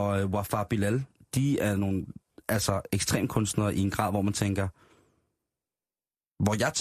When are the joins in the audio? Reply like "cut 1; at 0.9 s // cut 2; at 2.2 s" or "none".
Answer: none

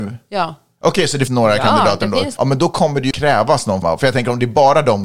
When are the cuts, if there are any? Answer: cut 1; at 1.3 s // cut 2; at 2.4 s // cut 3; at 3.1 s // cut 4; at 3.8 s

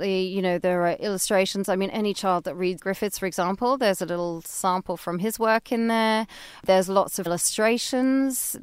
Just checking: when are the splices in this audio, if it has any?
cut 1; at 1.9 s // cut 2; at 2.8 s // cut 3; at 7.3 s

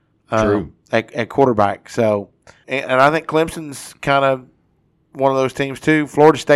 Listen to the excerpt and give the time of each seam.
cut 1; at 2.6 s

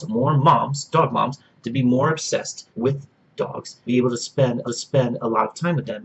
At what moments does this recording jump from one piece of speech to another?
cut 1; at 2.7 s // cut 2; at 3.9 s // cut 3; at 4.7 s

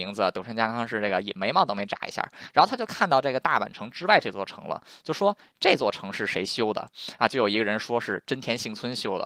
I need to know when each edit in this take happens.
none

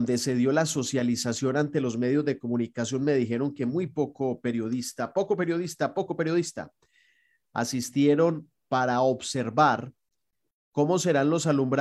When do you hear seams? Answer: cut 1; at 8.6 s

